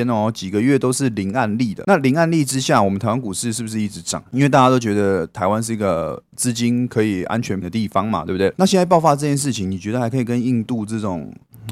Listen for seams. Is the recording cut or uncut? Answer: cut